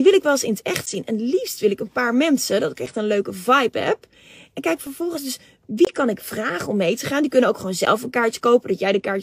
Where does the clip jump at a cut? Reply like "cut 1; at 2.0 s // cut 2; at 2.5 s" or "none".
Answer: none